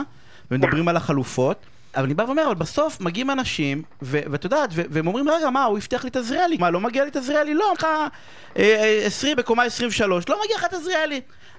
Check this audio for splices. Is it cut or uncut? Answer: cut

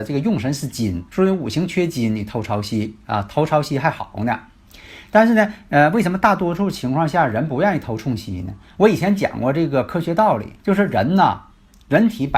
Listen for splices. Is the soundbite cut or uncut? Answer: cut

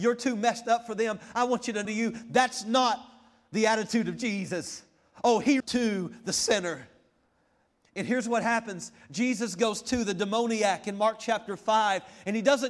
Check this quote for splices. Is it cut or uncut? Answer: cut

